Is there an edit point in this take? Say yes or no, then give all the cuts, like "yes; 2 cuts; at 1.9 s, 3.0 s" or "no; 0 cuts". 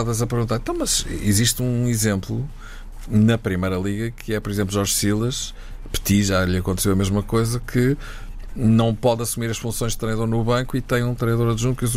no; 0 cuts